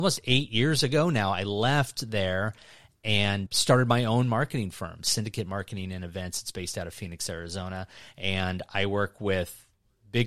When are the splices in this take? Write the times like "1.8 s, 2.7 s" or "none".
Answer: 3.5 s